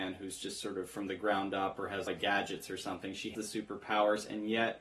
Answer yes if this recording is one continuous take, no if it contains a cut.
no